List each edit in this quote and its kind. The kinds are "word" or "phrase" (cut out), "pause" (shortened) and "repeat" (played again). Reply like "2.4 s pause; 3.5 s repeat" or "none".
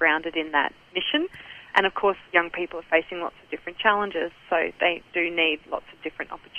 1.7 s word; 2.3 s pause